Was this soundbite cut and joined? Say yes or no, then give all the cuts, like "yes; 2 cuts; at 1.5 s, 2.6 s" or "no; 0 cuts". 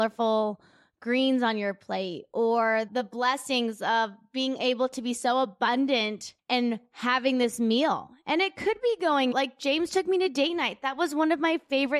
yes; 3 cuts; at 2.9 s, 6.4 s, 9.3 s